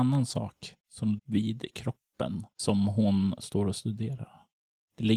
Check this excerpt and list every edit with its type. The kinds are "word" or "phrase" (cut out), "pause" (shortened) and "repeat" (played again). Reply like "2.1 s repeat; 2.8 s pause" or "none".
1.2 s word